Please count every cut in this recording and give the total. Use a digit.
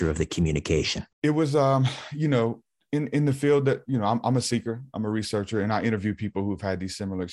2